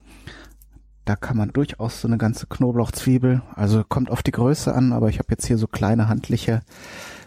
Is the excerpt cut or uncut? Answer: cut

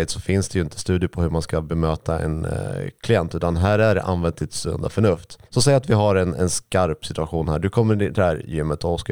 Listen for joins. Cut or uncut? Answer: cut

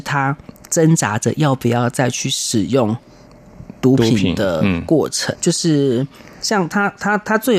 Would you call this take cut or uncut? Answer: cut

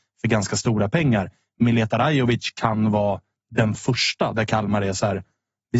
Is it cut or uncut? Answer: uncut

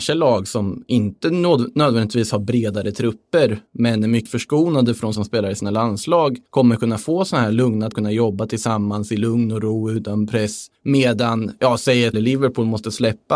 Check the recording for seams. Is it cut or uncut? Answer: cut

